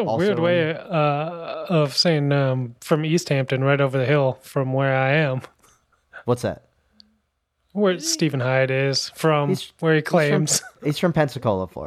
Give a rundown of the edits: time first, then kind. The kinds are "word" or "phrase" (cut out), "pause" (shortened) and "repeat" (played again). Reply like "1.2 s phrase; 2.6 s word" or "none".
none